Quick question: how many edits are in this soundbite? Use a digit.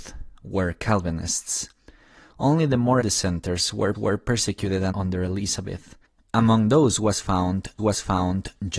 5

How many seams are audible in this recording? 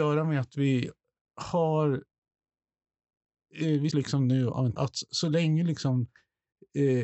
2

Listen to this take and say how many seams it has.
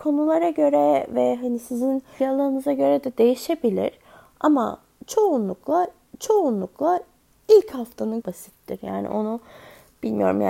3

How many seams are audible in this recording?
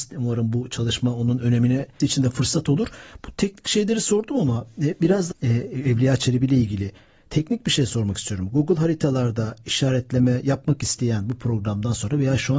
2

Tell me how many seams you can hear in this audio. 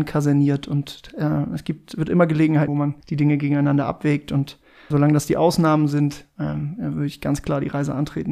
3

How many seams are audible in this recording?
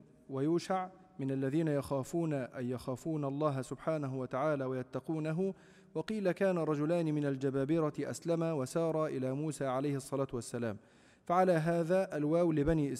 0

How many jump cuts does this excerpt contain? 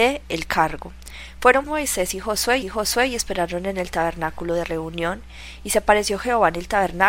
2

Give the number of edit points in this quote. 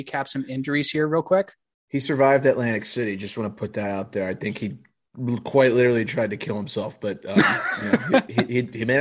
0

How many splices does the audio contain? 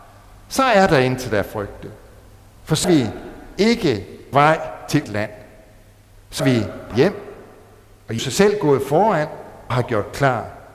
7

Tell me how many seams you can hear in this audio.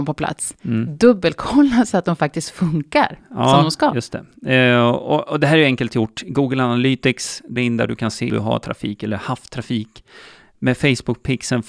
2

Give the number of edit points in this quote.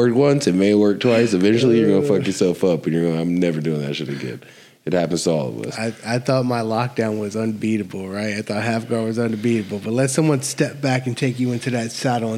0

